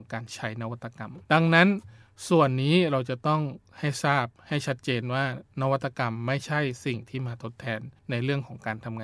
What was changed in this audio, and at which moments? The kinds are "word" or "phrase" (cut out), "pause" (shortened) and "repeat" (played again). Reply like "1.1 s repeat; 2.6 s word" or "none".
1.2 s pause; 4.4 s pause; 8.0 s pause